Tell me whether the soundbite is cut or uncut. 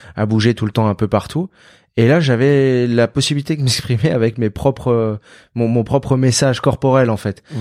uncut